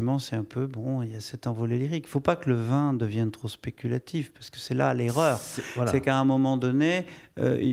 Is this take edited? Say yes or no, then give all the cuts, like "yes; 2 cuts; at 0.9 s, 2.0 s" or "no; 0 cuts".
no; 0 cuts